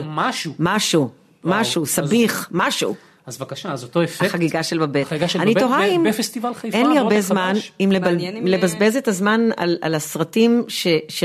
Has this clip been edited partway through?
no; 0 cuts

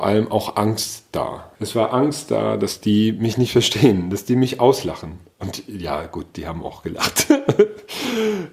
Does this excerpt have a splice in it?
yes; 1 cut; at 1.5 s

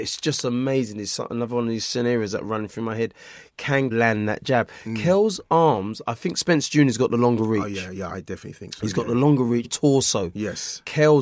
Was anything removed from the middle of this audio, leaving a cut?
yes; 3 cuts; at 3.9 s, 8.1 s, 9.6 s

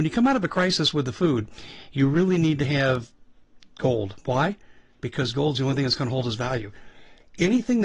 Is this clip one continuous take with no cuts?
yes; 0 cuts

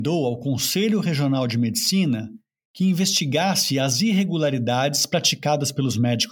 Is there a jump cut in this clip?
no; 0 cuts

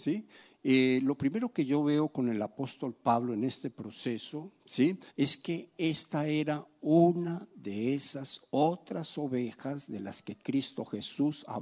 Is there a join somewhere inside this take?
yes; 1 cut; at 5.1 s

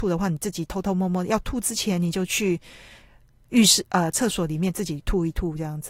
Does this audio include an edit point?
no; 0 cuts

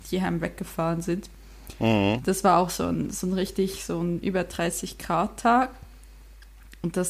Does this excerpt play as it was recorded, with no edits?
yes; 0 cuts

